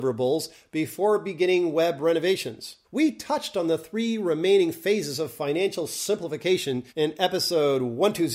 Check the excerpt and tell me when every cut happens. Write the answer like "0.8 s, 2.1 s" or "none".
2.8 s, 6.9 s

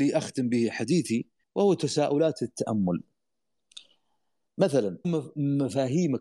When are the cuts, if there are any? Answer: 1.4 s, 5.0 s

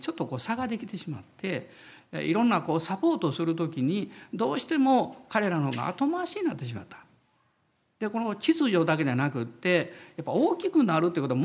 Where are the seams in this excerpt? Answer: none

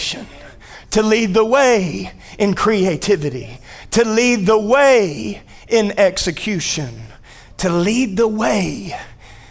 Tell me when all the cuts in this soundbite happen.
none

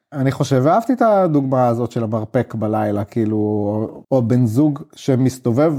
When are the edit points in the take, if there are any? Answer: 4.0 s

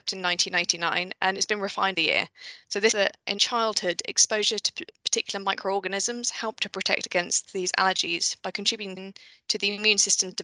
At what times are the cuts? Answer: 1.9 s, 2.9 s, 3.4 s, 9.0 s

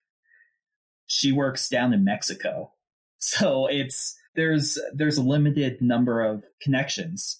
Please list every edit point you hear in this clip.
4.2 s, 6.5 s

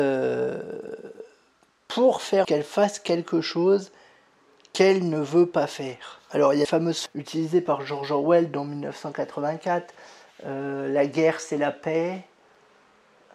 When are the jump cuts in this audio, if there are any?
2.4 s, 6.6 s, 7.1 s

